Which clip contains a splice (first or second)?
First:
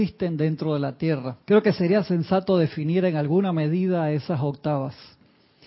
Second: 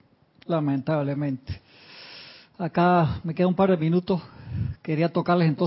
first